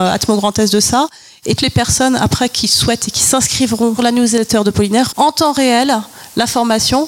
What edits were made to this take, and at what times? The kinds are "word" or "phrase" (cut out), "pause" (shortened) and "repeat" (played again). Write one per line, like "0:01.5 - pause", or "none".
0:01.6 - word
0:04.0 - word
0:05.1 - word